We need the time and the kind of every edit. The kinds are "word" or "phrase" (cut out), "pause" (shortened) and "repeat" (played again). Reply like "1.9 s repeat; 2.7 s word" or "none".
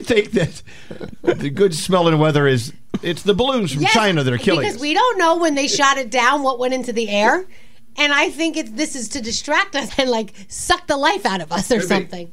9.9 s word